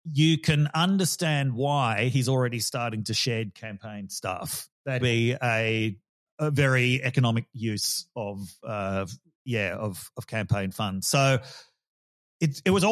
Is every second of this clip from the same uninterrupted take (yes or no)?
no